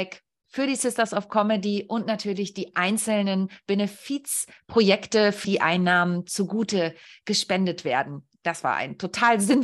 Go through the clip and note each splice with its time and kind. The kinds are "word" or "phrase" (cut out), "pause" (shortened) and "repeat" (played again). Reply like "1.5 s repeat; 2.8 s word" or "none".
5.4 s word